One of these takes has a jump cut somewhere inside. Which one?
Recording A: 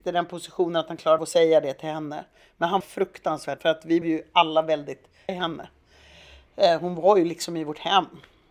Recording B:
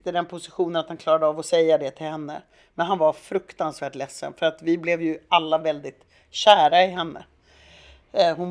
A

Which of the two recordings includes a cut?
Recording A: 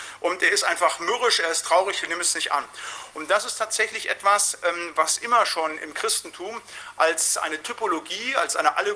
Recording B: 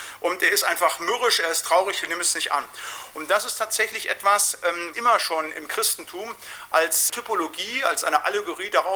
B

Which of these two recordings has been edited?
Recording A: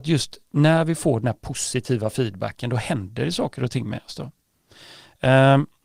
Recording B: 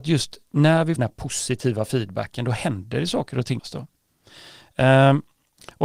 B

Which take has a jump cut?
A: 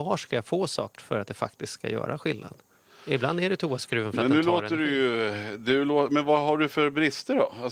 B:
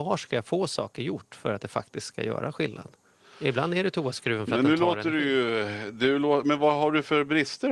A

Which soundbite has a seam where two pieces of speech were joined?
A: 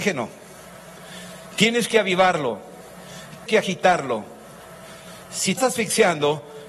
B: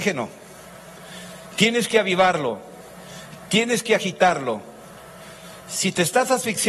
A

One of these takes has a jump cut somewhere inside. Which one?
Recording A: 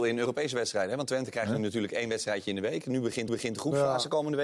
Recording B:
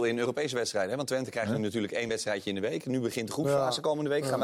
A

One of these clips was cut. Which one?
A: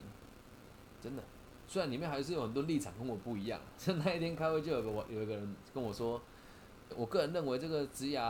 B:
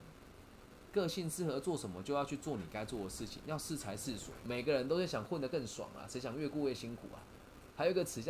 A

